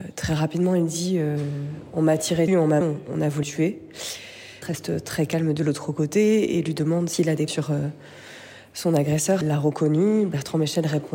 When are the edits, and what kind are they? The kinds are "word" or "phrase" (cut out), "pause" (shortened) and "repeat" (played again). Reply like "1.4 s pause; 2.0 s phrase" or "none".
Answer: 2.5 s word; 2.8 s word; 3.4 s word; 4.6 s word; 7.5 s word; 9.4 s word